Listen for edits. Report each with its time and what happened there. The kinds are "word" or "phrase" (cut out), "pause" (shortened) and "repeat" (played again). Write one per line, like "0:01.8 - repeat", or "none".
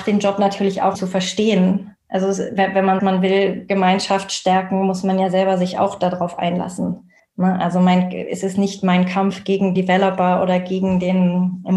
0:00.9 - word
0:02.0 - pause
0:03.0 - word
0:07.2 - pause
0:09.8 - word